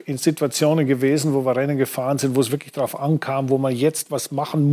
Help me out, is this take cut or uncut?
uncut